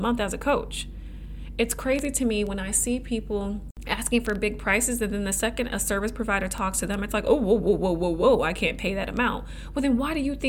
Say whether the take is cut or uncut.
uncut